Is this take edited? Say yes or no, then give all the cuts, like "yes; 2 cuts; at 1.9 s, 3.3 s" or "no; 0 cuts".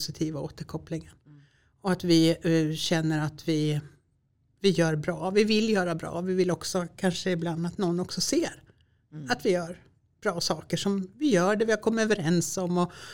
no; 0 cuts